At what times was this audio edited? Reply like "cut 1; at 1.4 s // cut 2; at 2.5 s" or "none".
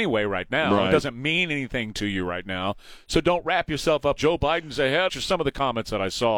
cut 1; at 4.2 s // cut 2; at 5.1 s